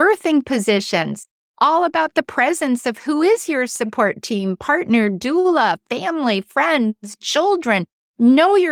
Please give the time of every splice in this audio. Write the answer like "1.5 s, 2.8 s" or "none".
none